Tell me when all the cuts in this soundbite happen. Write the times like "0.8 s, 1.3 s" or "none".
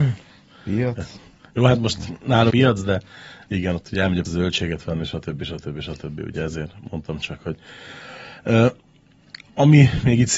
2.5 s, 4.2 s